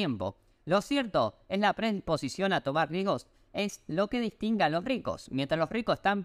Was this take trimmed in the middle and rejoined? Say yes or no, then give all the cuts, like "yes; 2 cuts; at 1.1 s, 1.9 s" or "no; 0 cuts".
no; 0 cuts